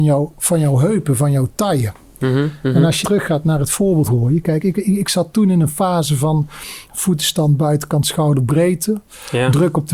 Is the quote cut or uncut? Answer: cut